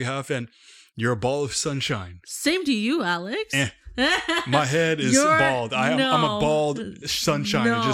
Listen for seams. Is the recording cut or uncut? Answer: uncut